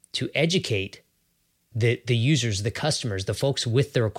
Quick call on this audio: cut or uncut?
uncut